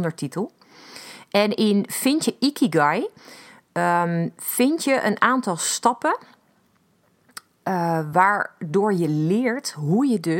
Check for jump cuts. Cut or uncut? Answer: uncut